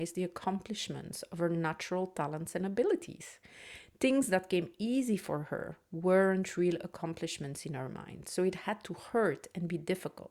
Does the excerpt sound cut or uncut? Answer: uncut